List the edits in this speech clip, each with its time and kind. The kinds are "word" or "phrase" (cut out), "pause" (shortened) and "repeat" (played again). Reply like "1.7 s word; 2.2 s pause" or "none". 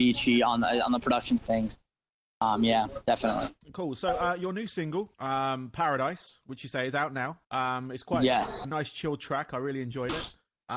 1.4 s word; 3.6 s pause; 5.1 s pause; 7.4 s pause; 8.6 s word